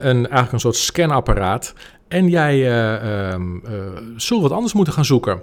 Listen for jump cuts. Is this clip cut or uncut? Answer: uncut